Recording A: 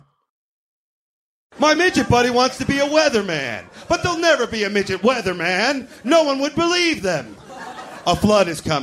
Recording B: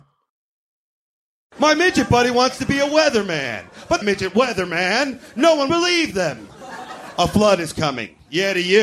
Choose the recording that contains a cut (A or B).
B